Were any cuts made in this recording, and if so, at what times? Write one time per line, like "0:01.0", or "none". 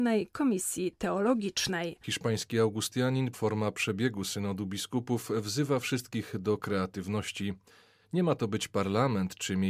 0:03.3